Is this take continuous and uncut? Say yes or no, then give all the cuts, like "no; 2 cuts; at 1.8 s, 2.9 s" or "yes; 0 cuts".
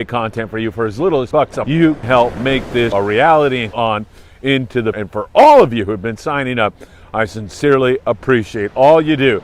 no; 6 cuts; at 1.3 s, 1.6 s, 2.0 s, 2.9 s, 3.7 s, 4.9 s